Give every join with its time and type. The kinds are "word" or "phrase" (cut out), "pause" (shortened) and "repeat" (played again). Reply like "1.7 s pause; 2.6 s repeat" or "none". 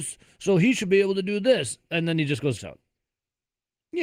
2.6 s word